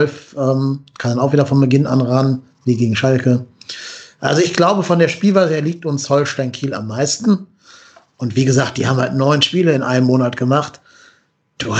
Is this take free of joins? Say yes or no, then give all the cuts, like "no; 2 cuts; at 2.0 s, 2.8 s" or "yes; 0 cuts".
yes; 0 cuts